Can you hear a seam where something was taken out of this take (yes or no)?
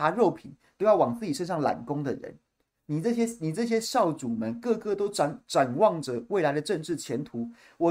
no